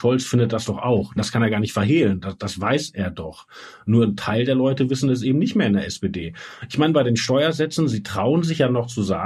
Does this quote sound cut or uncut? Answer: uncut